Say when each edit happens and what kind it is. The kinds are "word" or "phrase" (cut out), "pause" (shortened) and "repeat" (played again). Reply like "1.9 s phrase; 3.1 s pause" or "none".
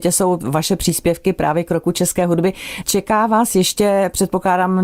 none